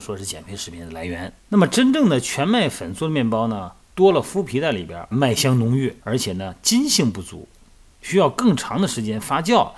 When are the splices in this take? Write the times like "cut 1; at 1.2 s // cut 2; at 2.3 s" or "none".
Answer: cut 1; at 1.4 s // cut 2; at 5.1 s // cut 3; at 6.0 s